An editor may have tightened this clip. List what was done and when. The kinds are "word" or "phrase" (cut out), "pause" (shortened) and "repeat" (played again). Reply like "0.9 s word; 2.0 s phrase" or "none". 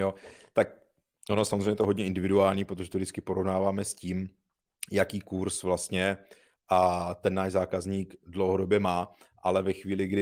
none